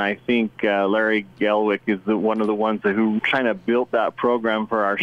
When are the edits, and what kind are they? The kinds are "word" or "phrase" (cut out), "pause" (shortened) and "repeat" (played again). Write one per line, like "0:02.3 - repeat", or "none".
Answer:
0:03.2 - word